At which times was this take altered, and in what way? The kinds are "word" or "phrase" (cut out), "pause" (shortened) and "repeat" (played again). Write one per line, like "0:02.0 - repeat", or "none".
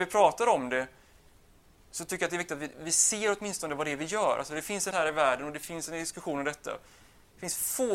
0:04.9 - word